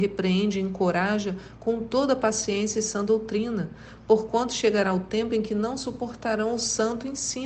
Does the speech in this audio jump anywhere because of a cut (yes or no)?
no